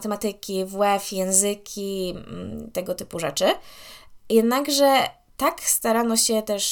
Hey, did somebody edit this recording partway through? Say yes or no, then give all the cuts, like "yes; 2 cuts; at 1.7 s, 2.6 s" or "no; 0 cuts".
no; 0 cuts